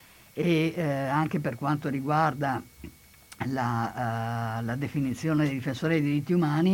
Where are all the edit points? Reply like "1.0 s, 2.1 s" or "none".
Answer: none